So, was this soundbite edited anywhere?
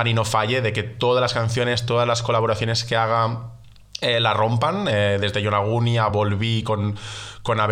no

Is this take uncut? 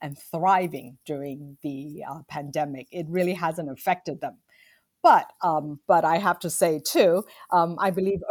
yes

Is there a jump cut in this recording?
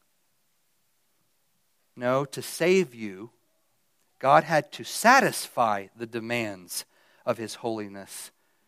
no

